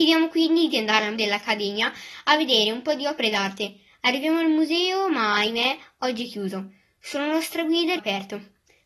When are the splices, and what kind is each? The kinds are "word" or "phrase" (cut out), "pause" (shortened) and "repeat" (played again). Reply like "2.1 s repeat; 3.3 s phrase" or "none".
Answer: 1.1 s word; 8.0 s word